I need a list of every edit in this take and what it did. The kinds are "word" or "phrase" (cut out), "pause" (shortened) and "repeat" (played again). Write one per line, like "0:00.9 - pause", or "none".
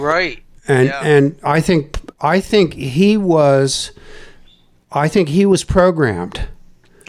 none